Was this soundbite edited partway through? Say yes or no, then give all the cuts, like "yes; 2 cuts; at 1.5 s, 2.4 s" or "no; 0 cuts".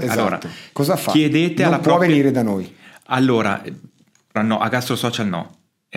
yes; 1 cut; at 4.4 s